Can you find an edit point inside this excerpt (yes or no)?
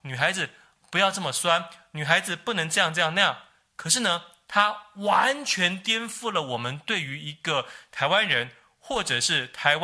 no